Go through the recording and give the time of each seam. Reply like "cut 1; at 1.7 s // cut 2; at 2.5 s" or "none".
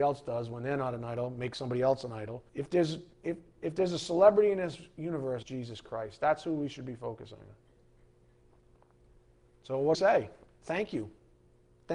cut 1; at 2.5 s // cut 2; at 3.1 s // cut 3; at 5.4 s // cut 4; at 9.9 s